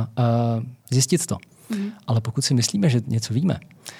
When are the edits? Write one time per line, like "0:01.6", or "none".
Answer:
none